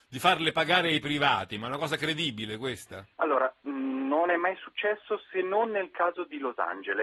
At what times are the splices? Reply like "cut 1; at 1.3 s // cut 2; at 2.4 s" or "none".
cut 1; at 3.1 s